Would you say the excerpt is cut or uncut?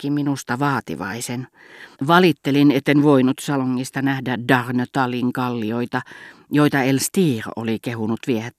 cut